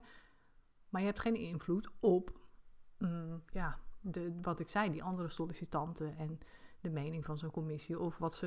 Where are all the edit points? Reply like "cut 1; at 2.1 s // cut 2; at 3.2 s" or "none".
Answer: none